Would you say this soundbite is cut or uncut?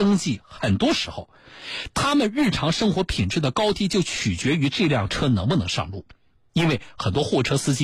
uncut